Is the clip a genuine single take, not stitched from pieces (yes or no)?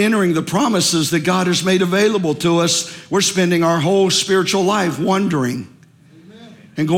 yes